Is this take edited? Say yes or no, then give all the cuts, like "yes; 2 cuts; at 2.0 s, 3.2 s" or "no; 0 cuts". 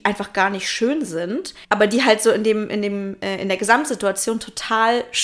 yes; 1 cut; at 1.6 s